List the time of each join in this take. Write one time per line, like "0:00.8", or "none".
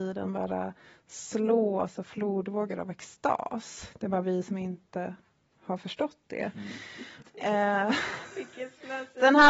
none

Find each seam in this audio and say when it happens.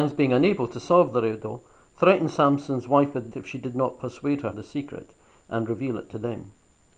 0:03.3
0:04.5

